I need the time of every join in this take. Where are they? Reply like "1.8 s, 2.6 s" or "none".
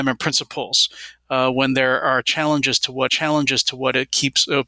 3.1 s